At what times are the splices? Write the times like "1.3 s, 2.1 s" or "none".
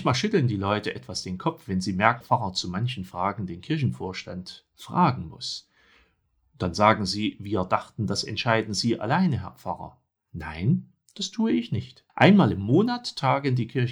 2.2 s, 12.1 s